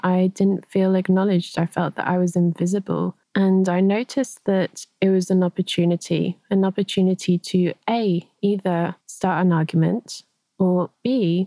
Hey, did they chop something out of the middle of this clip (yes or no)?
yes